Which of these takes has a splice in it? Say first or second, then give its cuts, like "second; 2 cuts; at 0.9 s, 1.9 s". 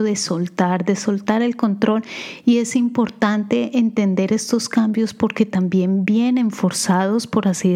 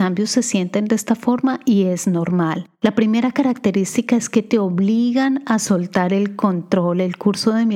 second; 1 cut; at 2.7 s